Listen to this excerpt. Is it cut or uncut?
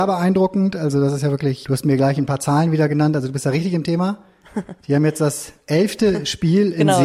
uncut